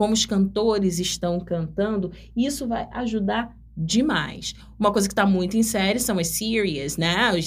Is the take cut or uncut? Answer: uncut